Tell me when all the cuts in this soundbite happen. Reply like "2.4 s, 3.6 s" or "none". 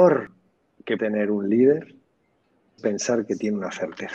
1.0 s, 2.8 s